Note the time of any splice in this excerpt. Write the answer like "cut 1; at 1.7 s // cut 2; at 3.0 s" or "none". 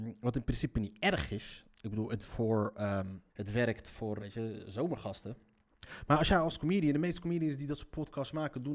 cut 1; at 2.2 s // cut 2; at 3.3 s // cut 3; at 4.2 s